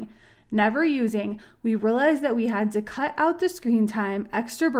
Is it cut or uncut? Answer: uncut